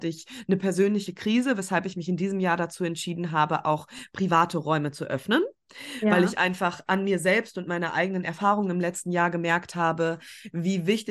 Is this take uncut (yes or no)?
yes